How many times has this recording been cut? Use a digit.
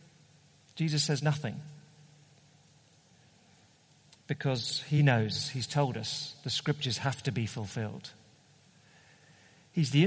0